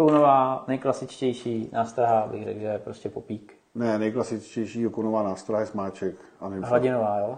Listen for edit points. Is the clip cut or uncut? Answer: uncut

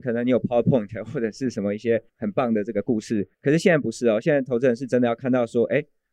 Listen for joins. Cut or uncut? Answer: cut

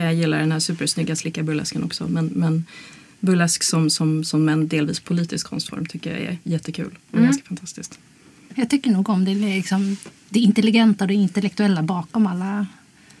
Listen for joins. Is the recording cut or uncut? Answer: uncut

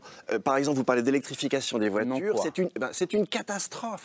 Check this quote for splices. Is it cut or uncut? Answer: uncut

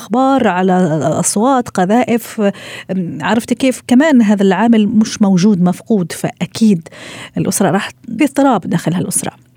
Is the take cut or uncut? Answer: cut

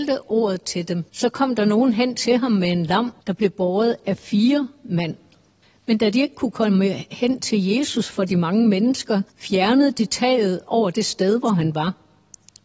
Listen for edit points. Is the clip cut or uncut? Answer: cut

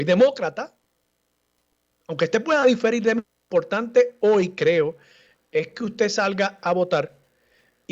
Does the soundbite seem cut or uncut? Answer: uncut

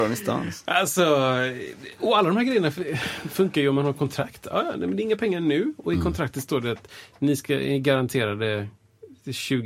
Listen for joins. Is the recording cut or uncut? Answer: uncut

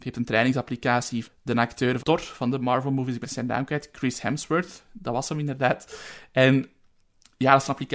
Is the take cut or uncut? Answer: cut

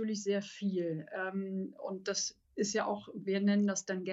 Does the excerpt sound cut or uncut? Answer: uncut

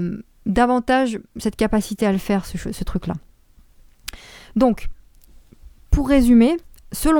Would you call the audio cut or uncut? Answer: uncut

